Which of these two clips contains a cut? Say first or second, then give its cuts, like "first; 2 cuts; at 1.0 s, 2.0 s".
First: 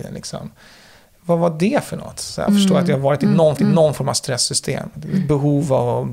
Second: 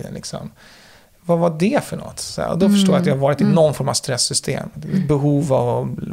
first; 2 cuts; at 2.5 s, 3.6 s